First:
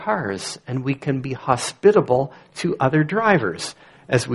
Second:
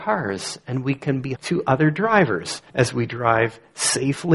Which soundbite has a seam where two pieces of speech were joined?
second; 2 cuts; at 1.3 s, 2.7 s

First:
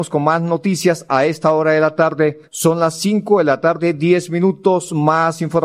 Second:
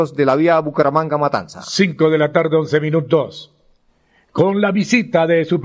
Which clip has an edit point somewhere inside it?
first; 1 cut; at 2.5 s

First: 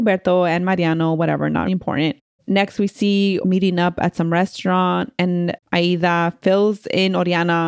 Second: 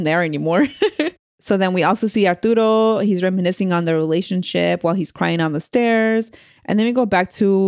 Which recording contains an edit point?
first; 3 cuts; at 1.7 s, 2.4 s, 3.4 s

